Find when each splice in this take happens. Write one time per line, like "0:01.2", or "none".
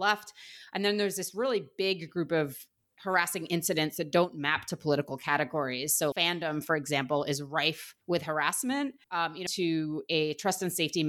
0:06.1
0:08.0
0:09.0
0:09.5